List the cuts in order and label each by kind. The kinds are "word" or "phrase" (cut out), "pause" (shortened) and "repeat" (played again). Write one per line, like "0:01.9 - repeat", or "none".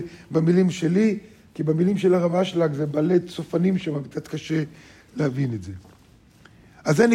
none